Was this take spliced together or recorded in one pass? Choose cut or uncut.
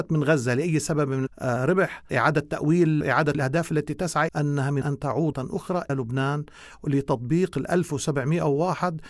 cut